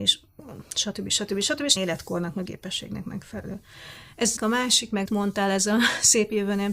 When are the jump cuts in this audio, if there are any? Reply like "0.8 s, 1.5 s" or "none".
1.8 s, 2.5 s, 4.4 s, 5.1 s

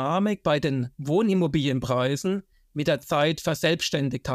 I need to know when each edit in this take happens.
none

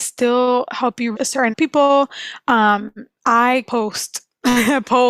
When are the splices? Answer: 1.1 s, 1.5 s, 3.7 s

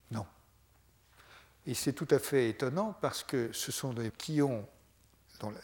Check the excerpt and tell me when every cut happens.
4.1 s

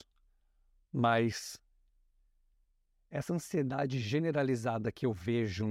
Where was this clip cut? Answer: none

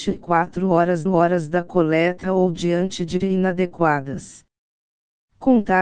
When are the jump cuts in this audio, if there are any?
1.1 s, 2.2 s, 3.2 s

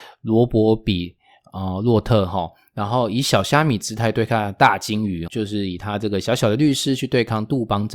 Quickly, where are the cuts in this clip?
5.3 s

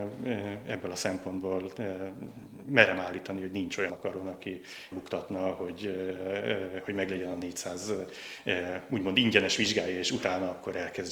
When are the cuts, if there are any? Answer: 3.9 s, 4.9 s

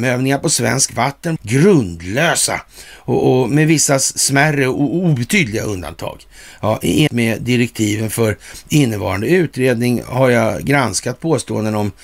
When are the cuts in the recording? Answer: 1.4 s, 7.1 s

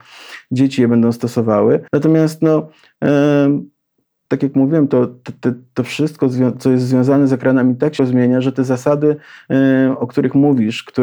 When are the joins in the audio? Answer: 1.9 s, 4.3 s, 8.0 s

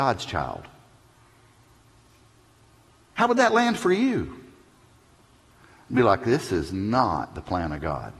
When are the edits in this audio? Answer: none

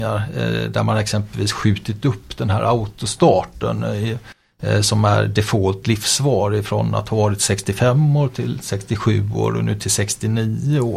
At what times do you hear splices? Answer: none

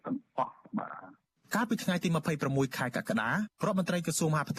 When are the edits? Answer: 3.6 s

